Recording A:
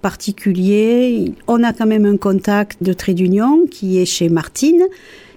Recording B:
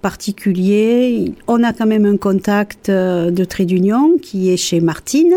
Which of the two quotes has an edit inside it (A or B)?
A